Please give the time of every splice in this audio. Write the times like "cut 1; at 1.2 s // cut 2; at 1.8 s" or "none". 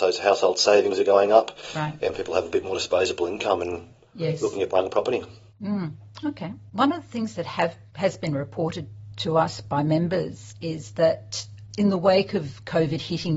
none